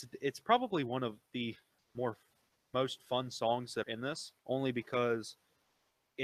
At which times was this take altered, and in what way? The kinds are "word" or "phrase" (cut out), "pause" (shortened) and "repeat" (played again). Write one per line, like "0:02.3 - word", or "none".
0:01.8 - word
0:03.8 - word
0:04.4 - pause